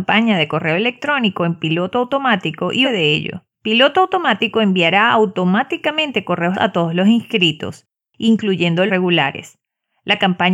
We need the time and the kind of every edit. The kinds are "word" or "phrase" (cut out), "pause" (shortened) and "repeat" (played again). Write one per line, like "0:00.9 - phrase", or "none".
0:02.8 - word
0:03.5 - pause
0:06.5 - word
0:08.9 - phrase